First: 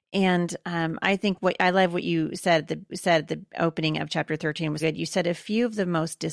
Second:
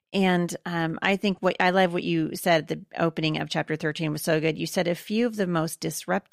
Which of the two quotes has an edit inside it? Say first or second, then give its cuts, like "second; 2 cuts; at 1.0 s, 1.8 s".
first; 2 cuts; at 2.9 s, 4.8 s